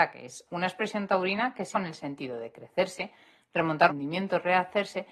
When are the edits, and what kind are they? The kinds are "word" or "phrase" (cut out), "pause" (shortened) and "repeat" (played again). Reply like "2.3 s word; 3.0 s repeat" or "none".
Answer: 1.7 s word; 3.9 s phrase